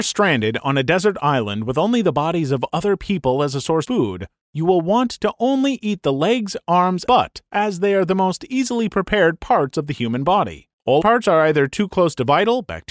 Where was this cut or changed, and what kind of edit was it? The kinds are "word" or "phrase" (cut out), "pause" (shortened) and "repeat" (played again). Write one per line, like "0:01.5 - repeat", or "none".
0:03.8 - word
0:07.1 - word
0:11.0 - word